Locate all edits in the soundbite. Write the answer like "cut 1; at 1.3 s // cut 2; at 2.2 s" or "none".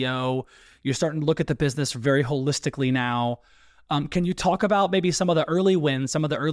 none